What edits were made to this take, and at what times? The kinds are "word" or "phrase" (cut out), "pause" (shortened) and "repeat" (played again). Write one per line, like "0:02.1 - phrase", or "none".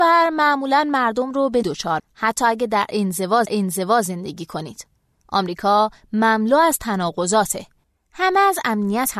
0:01.6 - word
0:02.0 - word
0:03.4 - repeat
0:07.8 - pause